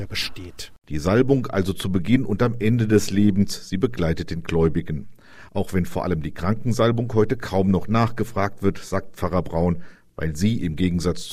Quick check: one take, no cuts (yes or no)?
yes